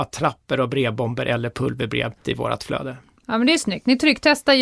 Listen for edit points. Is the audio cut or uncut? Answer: cut